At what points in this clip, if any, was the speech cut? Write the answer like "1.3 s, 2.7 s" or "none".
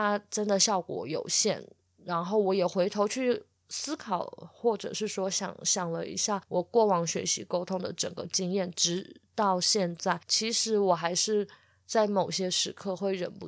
none